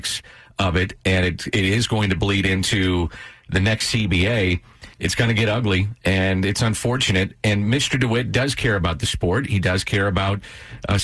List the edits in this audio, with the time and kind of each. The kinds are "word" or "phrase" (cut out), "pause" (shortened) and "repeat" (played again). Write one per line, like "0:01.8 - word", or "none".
0:04.9 - pause